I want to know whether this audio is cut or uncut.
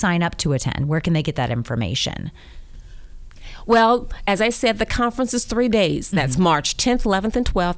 uncut